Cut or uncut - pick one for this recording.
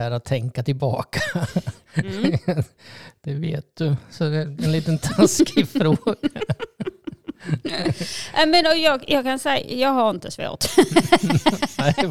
uncut